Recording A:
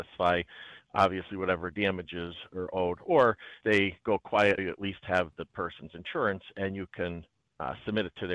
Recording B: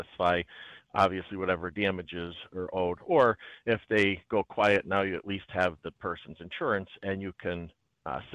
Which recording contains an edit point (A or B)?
A